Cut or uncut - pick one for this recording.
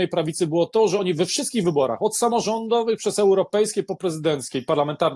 uncut